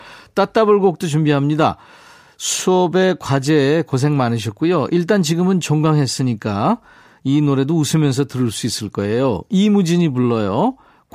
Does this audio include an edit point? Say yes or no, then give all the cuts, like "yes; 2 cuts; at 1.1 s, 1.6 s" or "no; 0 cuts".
no; 0 cuts